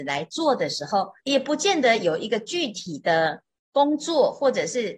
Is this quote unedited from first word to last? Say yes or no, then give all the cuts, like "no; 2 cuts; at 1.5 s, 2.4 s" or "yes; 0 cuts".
no; 1 cut; at 1.2 s